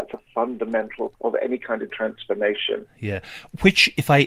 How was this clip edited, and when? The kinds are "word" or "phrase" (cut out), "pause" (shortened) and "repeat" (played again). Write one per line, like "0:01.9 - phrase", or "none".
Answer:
0:01.1 - word
0:01.9 - word